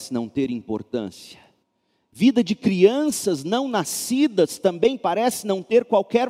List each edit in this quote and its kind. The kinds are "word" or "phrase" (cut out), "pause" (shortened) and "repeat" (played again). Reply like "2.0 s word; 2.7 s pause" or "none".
1.6 s pause